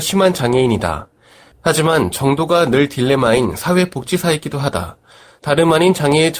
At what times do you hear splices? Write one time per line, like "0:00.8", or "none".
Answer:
none